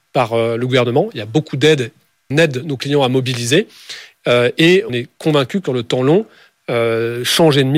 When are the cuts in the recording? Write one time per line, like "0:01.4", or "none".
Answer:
0:02.3
0:04.9
0:05.7